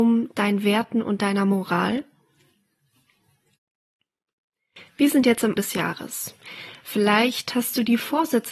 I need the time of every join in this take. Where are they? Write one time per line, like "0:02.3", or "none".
0:05.6